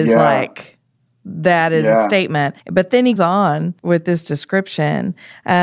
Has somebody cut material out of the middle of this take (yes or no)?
yes